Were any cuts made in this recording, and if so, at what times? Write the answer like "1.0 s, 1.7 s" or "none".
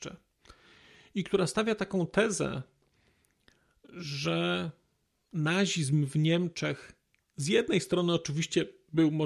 none

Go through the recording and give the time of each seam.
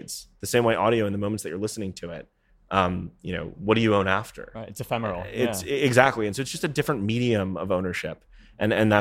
none

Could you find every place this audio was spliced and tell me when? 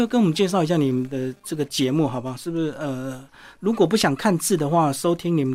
none

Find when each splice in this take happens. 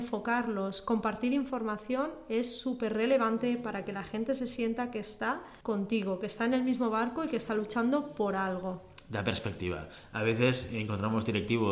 5.6 s

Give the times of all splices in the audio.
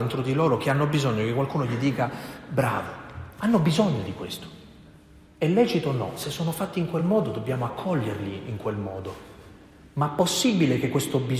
none

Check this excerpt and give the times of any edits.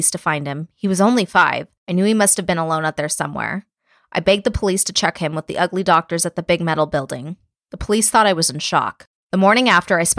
none

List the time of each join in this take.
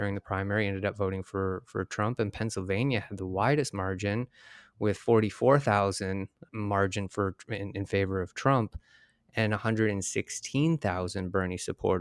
6.5 s

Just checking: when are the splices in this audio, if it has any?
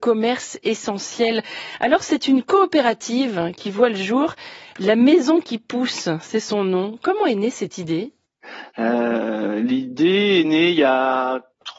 none

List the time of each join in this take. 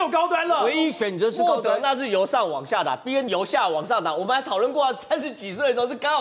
3.3 s

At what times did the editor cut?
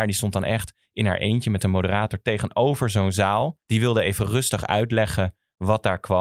3.6 s

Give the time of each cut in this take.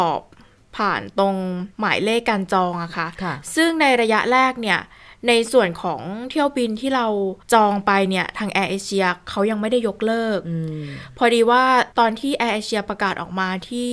1.7 s, 7.4 s, 11.9 s

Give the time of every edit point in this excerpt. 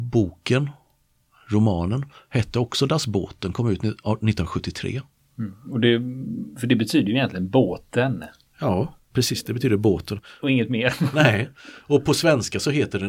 none

